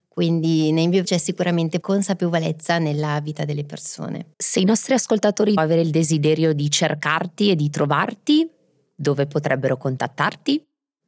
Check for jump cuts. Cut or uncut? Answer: cut